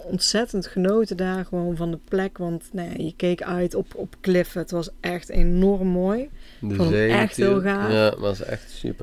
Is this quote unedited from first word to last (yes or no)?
yes